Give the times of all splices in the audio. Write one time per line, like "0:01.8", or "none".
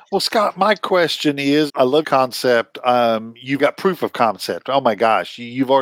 0:01.7
0:02.0
0:03.6